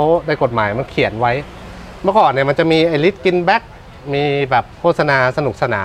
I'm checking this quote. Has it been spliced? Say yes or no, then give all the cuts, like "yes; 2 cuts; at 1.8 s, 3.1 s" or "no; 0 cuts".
yes; 1 cut; at 4.7 s